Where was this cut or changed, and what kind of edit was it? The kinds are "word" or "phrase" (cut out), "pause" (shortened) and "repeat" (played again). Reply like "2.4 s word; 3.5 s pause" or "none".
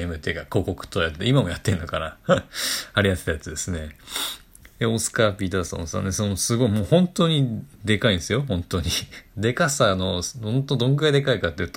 9.3 s pause